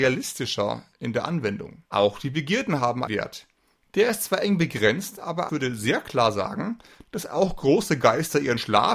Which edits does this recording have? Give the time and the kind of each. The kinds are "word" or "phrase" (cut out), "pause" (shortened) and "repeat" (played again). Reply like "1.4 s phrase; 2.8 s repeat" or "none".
1.8 s pause; 3.1 s word; 5.5 s word

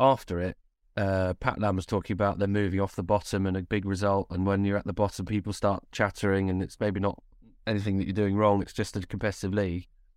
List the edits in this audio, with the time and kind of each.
none

